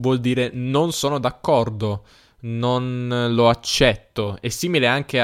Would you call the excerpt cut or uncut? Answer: uncut